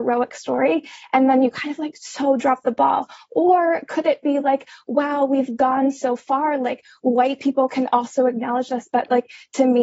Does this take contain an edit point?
no; 0 cuts

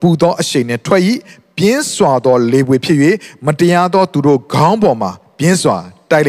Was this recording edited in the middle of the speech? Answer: no; 0 cuts

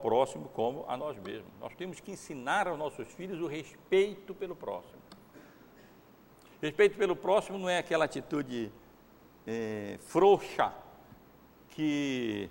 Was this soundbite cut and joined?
no; 0 cuts

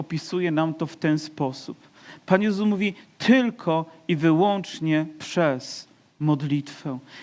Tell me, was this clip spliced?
no; 0 cuts

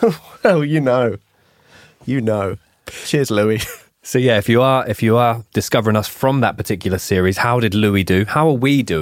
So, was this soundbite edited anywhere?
no; 0 cuts

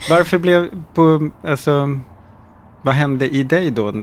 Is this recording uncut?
yes; 0 cuts

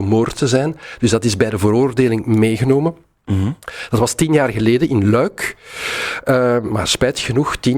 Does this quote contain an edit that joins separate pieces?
no; 0 cuts

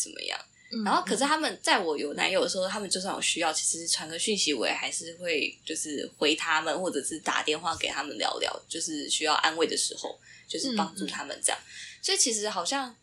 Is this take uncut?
yes; 0 cuts

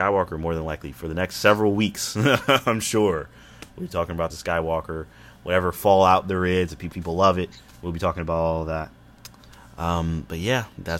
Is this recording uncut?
no; 2 cuts; at 4.3 s, 6.9 s

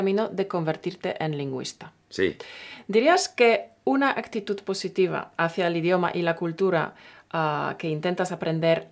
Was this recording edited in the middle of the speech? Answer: no; 0 cuts

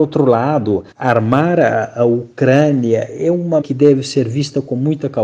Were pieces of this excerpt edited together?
yes; 2 cuts; at 0.9 s, 3.6 s

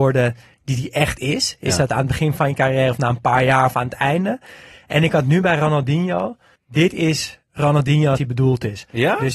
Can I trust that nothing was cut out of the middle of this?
no; 2 cuts; at 6.6 s, 8.2 s

